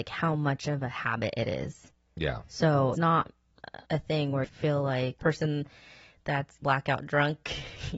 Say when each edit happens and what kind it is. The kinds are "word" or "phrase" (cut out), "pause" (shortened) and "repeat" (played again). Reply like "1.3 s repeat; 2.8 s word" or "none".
2.9 s word; 3.8 s pause; 4.4 s word; 5.2 s phrase; 6.6 s word